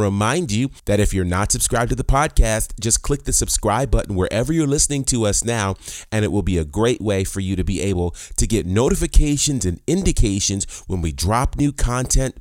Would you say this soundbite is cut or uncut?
uncut